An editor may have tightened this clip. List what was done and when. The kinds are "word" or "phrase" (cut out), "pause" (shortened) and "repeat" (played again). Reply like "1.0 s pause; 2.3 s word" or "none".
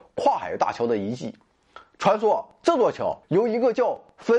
3.2 s pause

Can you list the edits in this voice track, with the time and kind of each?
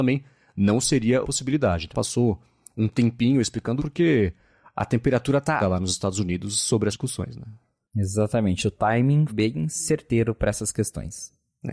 1.2 s word; 1.9 s word; 3.8 s word; 5.6 s word; 6.9 s word; 9.3 s word

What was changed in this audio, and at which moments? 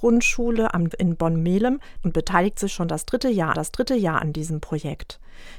0.9 s word; 2.0 s phrase; 3.5 s repeat

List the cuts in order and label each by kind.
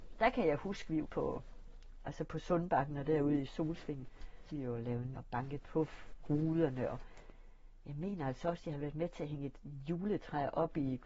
1.0 s word; 4.5 s word; 5.1 s word

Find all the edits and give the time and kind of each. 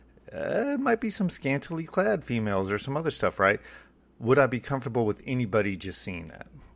none

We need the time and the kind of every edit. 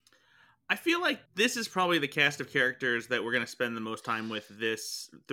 1.3 s pause

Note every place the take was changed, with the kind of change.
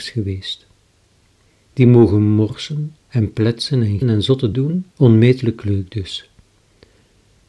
3.0 s pause; 4.0 s word; 4.5 s word; 4.9 s pause

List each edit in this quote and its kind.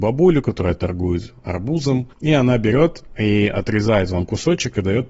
2.1 s pause

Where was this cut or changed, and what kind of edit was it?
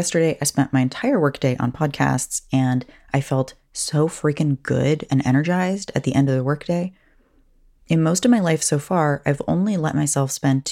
none

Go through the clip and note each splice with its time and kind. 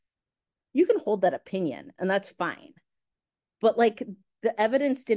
none

